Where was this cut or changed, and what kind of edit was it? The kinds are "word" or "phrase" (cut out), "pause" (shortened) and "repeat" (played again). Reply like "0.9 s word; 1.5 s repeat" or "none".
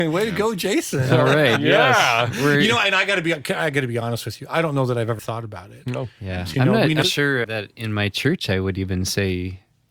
5.2 s word; 6.5 s word; 7.0 s phrase; 7.4 s word